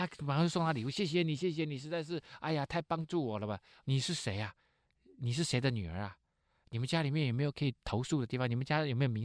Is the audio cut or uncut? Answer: uncut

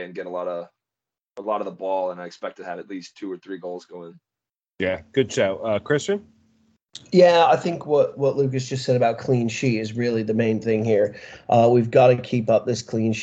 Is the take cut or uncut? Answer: cut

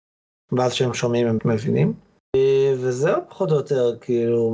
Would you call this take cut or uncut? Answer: cut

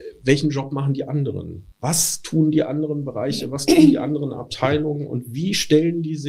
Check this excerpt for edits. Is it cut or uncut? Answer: cut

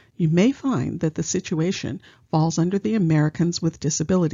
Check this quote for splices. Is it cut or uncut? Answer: uncut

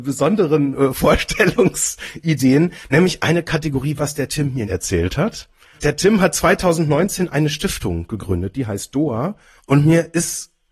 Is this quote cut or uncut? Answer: cut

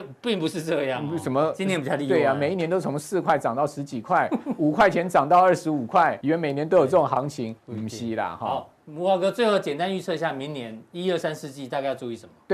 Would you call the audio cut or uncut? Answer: cut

